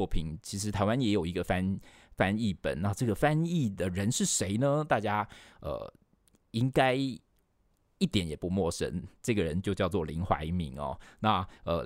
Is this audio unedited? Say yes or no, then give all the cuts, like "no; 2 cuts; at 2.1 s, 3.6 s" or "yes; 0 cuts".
yes; 0 cuts